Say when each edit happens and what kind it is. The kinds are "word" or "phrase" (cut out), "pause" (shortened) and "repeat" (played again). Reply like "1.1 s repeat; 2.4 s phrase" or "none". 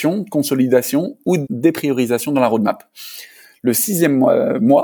1.5 s word